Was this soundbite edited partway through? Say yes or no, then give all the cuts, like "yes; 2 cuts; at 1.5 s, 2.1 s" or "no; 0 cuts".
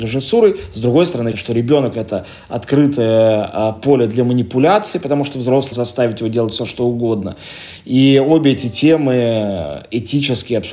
yes; 2 cuts; at 1.3 s, 5.7 s